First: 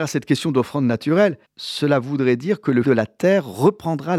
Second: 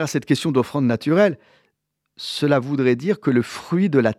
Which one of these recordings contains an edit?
first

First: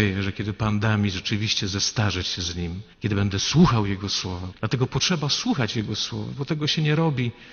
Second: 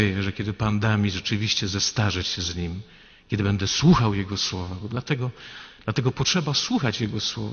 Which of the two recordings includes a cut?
first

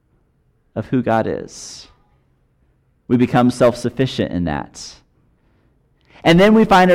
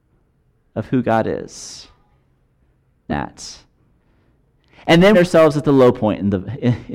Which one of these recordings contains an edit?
second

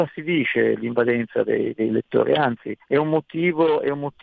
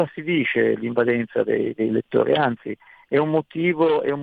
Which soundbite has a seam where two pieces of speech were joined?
first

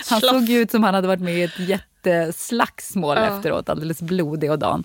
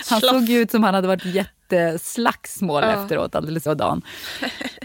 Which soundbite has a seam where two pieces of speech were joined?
second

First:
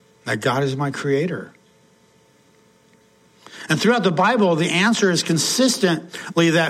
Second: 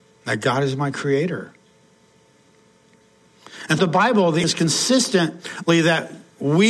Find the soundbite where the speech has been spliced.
second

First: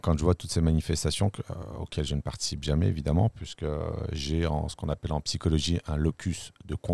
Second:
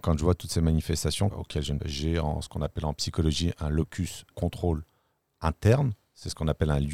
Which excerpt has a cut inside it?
second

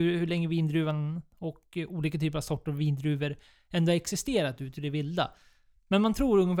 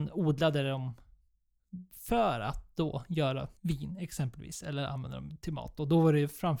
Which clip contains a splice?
second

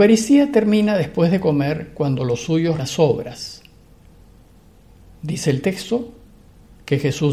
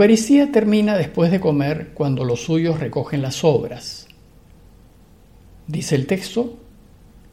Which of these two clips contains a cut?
first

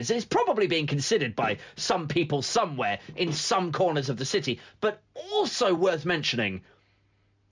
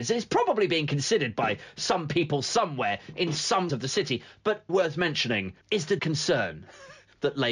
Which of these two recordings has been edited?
second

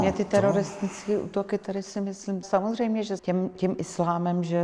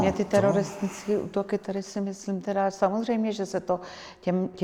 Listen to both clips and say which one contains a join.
first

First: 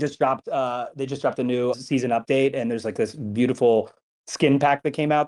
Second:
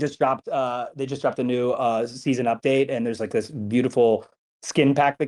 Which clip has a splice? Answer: first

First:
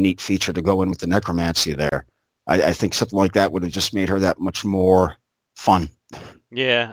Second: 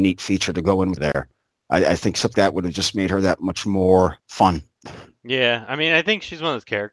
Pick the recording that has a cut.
second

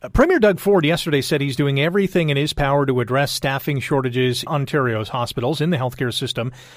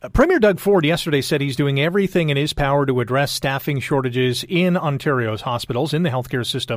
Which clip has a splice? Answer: first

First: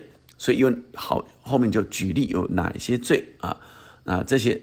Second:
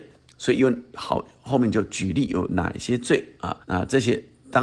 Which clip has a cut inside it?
second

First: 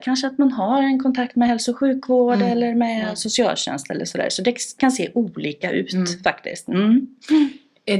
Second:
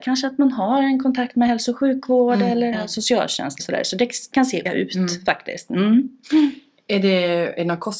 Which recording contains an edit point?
second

